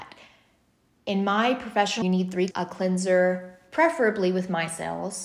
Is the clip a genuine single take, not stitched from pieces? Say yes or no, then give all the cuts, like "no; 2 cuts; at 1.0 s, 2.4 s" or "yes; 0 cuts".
no; 2 cuts; at 2.0 s, 2.5 s